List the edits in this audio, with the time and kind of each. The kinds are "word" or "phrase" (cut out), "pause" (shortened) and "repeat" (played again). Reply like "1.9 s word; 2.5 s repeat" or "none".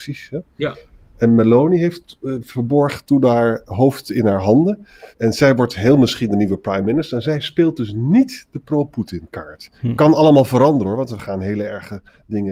5.1 s pause